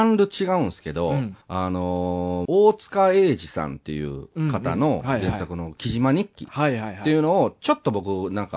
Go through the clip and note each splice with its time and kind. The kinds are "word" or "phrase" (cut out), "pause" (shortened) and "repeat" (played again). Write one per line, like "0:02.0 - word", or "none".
0:01.4 - pause
0:02.5 - word